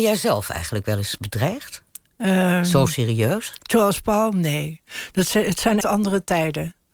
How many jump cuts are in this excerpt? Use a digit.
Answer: 1